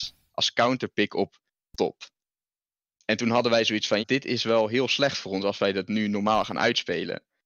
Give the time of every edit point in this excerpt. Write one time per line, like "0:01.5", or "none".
0:01.7
0:04.0